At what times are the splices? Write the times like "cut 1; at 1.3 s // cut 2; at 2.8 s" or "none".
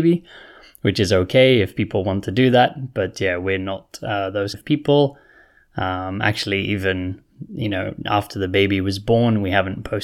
cut 1; at 4.5 s